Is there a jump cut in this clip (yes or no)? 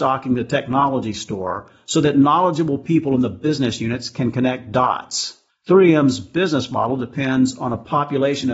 yes